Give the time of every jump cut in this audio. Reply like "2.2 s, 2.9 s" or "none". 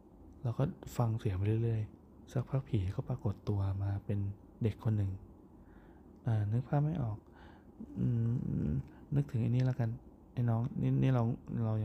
2.3 s